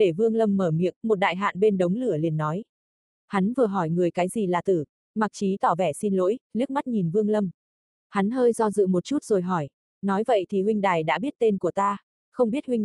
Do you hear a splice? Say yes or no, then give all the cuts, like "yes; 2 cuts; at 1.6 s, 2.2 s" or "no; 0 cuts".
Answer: no; 0 cuts